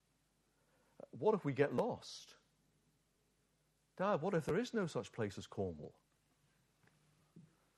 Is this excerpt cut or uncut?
uncut